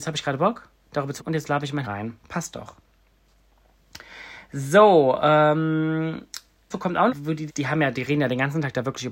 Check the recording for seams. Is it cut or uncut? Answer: cut